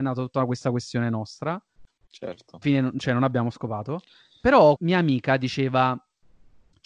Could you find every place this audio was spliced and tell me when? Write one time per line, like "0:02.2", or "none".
0:02.6
0:04.8